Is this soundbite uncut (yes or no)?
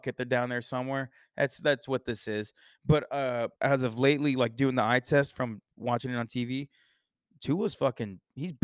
no